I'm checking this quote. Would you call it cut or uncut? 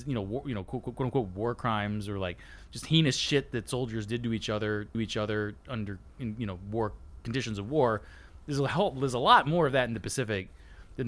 cut